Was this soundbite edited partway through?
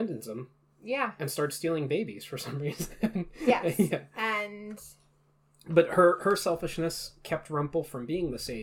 no; 0 cuts

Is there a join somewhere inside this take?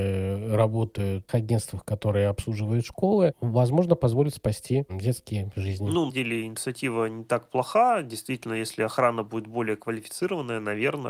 yes; 2 cuts; at 1.3 s, 6.1 s

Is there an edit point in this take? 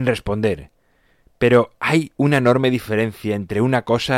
no; 0 cuts

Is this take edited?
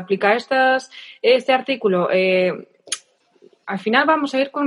no; 0 cuts

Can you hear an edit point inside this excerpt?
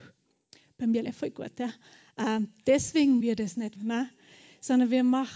yes; 3 cuts; at 1.1 s, 3.2 s, 3.8 s

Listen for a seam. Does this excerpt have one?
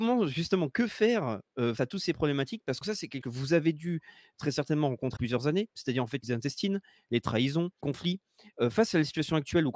yes; 6 cuts; at 1.8 s, 2.8 s, 3.2 s, 5.2 s, 6.2 s, 7.8 s

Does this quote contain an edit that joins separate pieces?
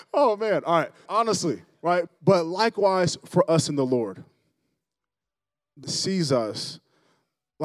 yes; 3 cuts; at 1.1 s, 2.1 s, 5.8 s

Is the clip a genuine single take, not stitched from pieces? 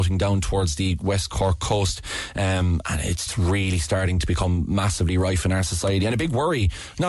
no; 1 cut; at 3.3 s

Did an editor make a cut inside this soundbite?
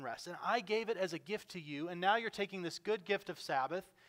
no; 0 cuts

